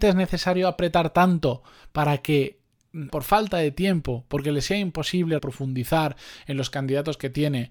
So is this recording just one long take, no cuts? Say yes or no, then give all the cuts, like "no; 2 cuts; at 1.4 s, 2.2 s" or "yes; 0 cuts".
no; 2 cuts; at 3.1 s, 5.4 s